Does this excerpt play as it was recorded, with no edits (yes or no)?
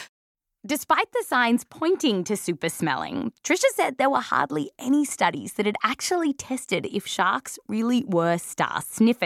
yes